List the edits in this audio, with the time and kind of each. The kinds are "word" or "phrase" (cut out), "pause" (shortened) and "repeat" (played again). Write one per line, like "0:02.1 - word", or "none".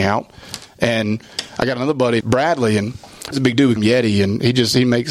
0:02.2 - word
0:03.3 - word
0:03.8 - word